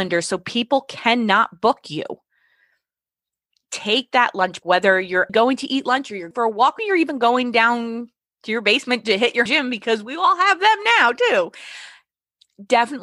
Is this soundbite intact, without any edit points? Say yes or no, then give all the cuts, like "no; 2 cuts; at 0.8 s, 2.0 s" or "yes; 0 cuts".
no; 5 cuts; at 4.6 s, 5.3 s, 6.3 s, 6.8 s, 9.5 s